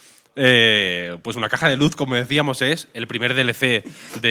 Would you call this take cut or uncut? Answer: uncut